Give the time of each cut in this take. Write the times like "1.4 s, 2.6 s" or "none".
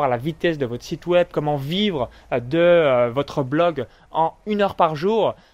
none